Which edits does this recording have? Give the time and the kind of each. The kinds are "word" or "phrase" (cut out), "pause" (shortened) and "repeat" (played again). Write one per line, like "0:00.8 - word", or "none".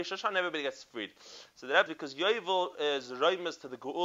0:01.9 - word